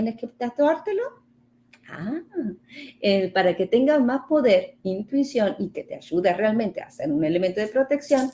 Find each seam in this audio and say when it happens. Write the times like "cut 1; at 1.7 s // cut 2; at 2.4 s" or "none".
none